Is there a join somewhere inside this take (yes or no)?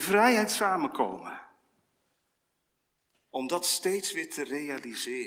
no